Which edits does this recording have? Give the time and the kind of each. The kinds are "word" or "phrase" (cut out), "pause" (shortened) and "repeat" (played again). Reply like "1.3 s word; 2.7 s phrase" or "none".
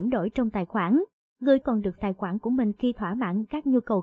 1.6 s word; 2.0 s phrase